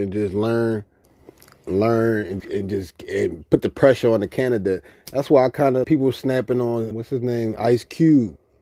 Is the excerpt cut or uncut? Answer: cut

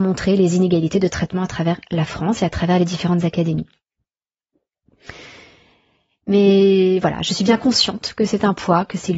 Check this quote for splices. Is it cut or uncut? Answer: uncut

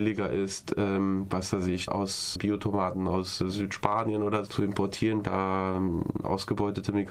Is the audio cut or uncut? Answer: cut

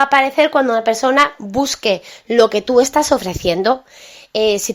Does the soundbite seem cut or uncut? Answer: uncut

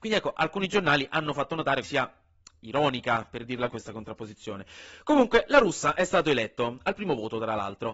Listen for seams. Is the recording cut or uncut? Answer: cut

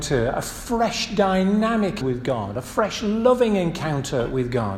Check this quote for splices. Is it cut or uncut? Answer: cut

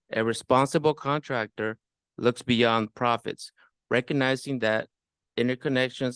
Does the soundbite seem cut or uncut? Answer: uncut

